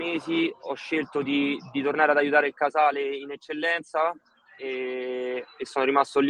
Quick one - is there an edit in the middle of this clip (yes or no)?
no